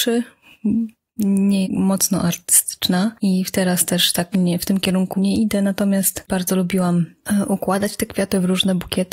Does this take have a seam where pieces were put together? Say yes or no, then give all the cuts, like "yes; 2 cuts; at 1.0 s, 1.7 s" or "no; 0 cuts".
yes; 4 cuts; at 1.6 s, 4.3 s, 5.2 s, 6.3 s